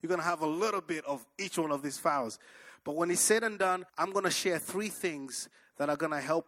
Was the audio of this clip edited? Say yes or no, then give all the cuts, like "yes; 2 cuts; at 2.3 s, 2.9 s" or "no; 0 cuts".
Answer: yes; 1 cut; at 3.9 s